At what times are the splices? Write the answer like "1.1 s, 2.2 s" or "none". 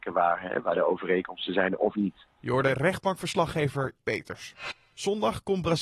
1.9 s, 4.0 s